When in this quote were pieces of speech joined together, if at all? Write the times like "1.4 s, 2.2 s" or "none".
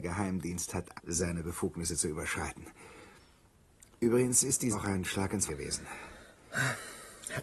0.9 s, 4.7 s, 5.5 s